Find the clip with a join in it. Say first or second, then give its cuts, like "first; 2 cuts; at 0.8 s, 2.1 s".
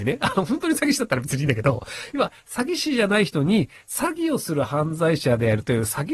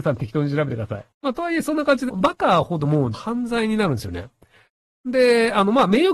second; 3 cuts; at 1.1 s, 2.1 s, 3.1 s